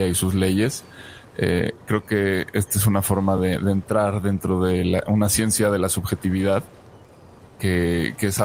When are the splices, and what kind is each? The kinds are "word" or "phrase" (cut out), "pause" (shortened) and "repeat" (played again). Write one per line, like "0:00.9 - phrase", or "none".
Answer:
none